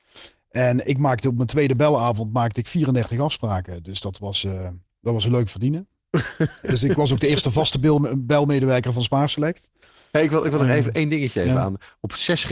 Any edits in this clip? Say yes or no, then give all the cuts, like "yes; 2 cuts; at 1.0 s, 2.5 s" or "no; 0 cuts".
no; 0 cuts